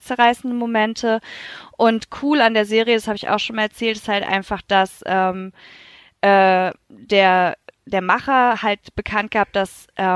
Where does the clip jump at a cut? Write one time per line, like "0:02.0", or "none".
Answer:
none